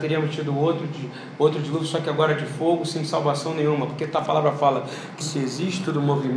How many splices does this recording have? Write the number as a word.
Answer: one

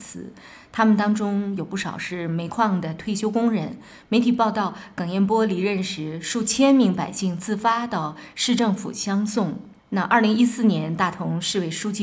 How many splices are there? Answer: one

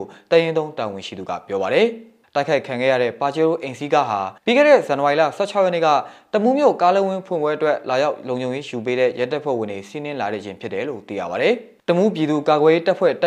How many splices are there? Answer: two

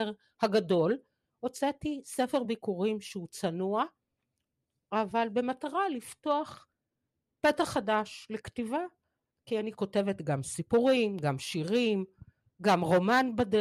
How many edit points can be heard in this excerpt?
zero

